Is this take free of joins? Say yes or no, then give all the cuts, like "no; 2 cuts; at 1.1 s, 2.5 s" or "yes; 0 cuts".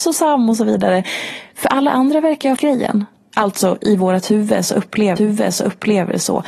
no; 2 cuts; at 2.6 s, 5.2 s